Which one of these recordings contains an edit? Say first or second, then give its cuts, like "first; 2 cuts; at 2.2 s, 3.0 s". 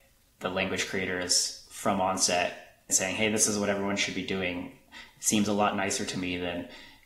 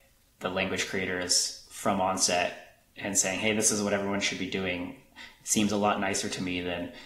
first; 1 cut; at 2.9 s